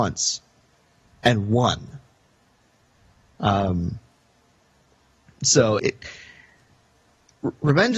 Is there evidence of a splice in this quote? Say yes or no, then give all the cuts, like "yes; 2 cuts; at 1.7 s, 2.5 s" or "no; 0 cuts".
yes; 1 cut; at 5.8 s